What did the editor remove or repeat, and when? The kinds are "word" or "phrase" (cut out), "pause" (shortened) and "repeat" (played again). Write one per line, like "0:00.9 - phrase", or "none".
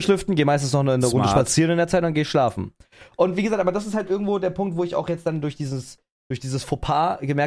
none